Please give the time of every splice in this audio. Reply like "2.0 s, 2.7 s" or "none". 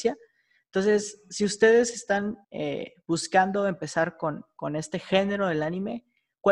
2.4 s